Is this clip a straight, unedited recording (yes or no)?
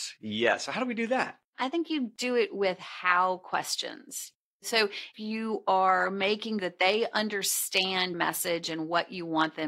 no